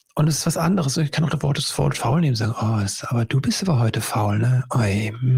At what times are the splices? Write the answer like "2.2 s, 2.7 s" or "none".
none